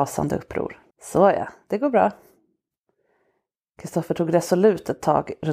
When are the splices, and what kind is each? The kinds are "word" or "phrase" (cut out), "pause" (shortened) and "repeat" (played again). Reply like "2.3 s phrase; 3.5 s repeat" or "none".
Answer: 0.9 s pause